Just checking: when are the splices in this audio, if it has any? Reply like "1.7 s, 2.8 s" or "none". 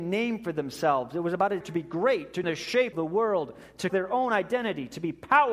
1.6 s, 2.4 s, 2.9 s, 3.9 s